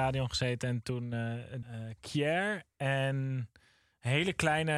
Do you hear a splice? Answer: yes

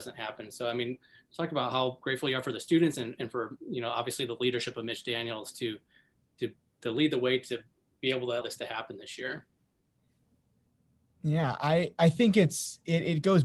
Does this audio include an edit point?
yes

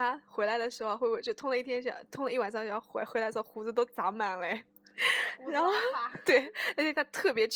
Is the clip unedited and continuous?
yes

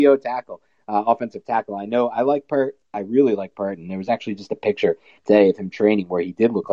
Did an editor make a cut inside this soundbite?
no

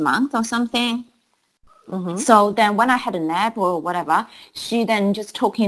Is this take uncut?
yes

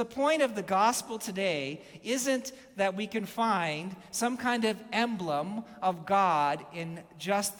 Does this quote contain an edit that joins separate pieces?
no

